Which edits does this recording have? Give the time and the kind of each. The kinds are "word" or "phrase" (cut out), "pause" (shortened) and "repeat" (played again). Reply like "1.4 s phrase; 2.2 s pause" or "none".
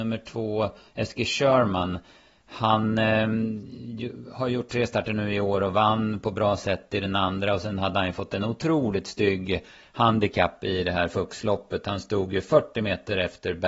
none